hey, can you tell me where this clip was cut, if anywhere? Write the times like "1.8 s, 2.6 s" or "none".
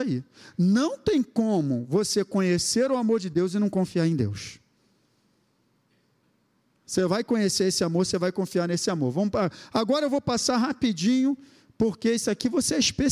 none